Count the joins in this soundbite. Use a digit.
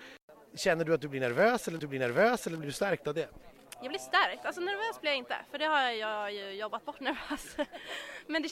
2